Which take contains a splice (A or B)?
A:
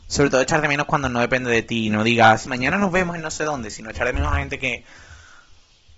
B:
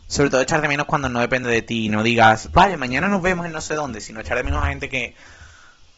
A